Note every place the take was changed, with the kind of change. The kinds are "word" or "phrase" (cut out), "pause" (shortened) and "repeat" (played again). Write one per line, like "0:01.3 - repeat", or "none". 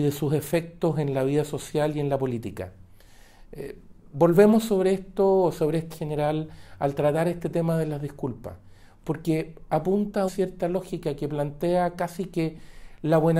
0:05.9 - word
0:10.3 - word